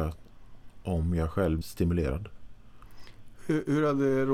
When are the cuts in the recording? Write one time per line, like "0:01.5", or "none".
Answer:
0:01.6